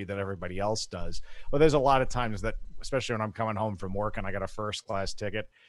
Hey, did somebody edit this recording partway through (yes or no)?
no